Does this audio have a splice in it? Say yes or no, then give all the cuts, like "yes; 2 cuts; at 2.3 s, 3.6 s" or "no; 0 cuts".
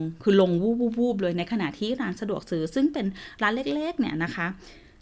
no; 0 cuts